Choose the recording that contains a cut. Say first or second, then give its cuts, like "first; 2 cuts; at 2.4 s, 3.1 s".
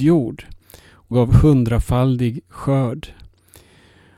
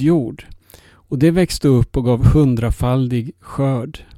first; 1 cut; at 1.1 s